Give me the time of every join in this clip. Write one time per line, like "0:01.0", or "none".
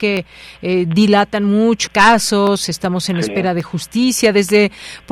0:01.9